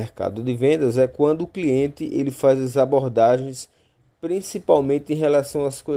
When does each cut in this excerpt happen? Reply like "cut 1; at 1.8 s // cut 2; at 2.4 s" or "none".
none